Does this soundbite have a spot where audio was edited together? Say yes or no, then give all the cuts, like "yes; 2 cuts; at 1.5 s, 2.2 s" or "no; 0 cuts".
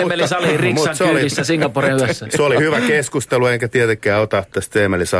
no; 0 cuts